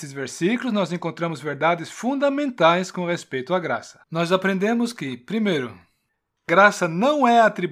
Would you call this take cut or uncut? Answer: cut